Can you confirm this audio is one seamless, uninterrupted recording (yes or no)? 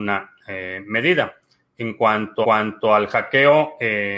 no